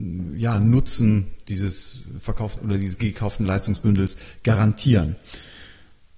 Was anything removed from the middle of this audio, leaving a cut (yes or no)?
yes